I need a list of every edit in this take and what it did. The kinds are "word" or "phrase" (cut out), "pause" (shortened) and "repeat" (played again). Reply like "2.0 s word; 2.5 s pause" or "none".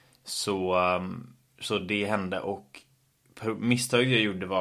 none